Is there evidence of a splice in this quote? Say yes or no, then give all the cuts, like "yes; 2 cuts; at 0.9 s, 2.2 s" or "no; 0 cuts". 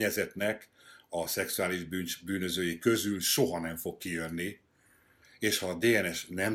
no; 0 cuts